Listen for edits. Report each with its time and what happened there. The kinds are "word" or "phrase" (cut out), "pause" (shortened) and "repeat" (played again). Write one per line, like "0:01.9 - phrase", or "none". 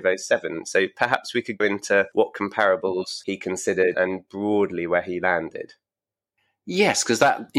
0:01.6 - word
0:03.9 - word